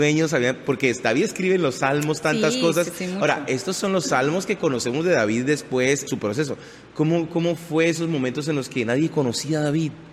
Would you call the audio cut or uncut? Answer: cut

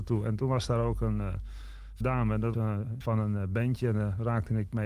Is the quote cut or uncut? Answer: cut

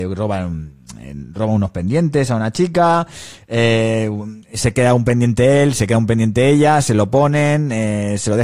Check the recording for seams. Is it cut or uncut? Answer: uncut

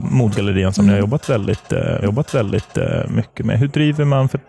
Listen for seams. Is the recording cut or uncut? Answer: cut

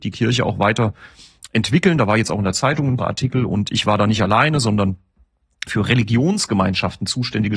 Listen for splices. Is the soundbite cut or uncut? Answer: cut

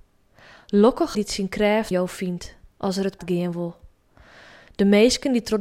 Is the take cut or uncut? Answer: cut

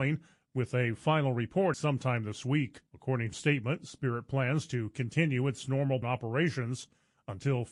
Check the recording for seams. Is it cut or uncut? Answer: cut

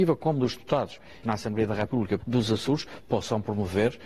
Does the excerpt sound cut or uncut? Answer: cut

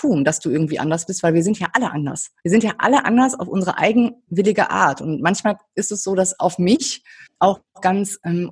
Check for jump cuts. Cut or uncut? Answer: cut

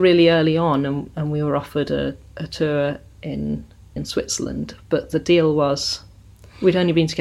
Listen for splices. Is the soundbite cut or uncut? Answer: cut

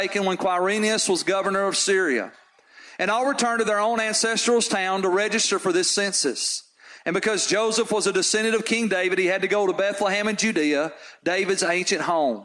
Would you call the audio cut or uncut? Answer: uncut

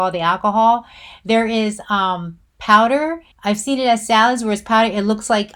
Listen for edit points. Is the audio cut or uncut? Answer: cut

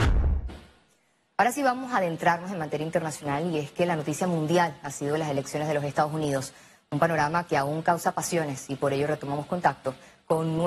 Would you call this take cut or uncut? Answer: uncut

